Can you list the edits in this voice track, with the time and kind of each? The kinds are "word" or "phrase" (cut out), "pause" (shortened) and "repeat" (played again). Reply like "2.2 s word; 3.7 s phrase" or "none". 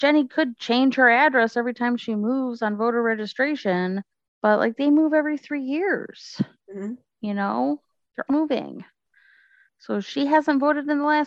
4.1 s pause; 8.3 s word